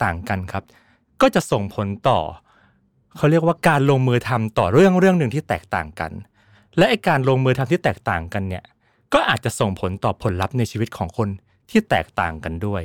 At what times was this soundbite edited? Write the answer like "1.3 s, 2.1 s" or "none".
none